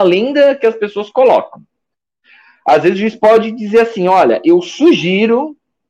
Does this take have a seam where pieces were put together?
no; 0 cuts

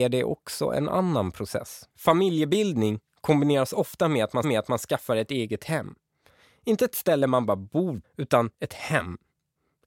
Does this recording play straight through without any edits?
no; 4 cuts; at 1.9 s, 4.4 s, 8.0 s, 8.5 s

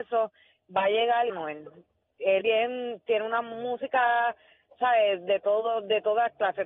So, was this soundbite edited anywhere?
yes; 3 cuts; at 1.3 s, 2.4 s, 4.7 s

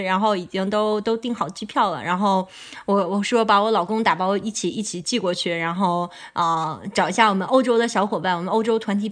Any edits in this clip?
no; 0 cuts

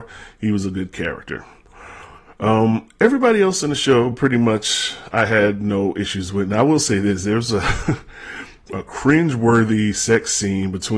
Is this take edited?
no; 0 cuts

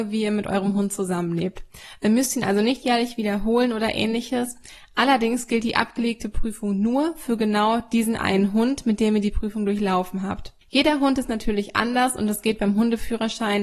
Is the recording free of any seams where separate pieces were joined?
no; 1 cut; at 10.6 s

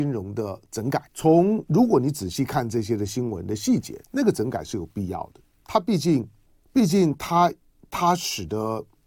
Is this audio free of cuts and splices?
no; 3 cuts; at 1.1 s, 4.0 s, 6.5 s

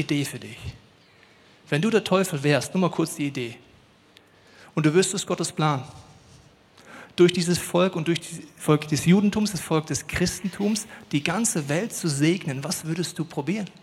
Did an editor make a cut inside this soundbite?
no; 0 cuts

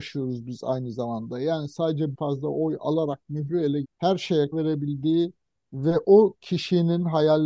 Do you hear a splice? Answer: yes; 3 cuts; at 2.1 s, 3.8 s, 4.5 s

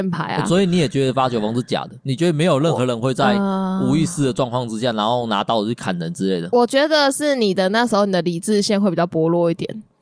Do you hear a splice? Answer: yes; 1 cut; at 2.0 s

